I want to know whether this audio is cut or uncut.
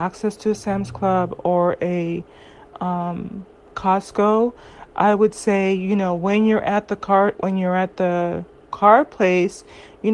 uncut